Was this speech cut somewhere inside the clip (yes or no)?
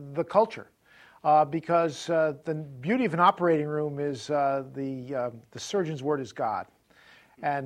no